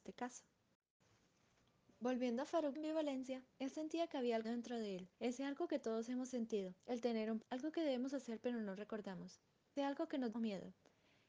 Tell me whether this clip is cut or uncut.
cut